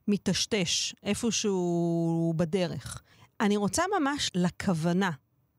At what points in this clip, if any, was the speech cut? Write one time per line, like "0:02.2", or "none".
0:03.1
0:04.3